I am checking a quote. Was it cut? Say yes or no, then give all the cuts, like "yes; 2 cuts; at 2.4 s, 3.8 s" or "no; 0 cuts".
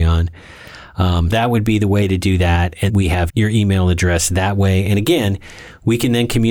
yes; 3 cuts; at 1.3 s, 2.9 s, 3.3 s